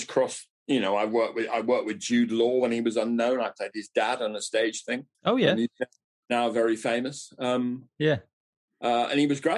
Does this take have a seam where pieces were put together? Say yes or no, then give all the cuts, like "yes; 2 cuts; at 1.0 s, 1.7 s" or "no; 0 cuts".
yes; 1 cut; at 5.1 s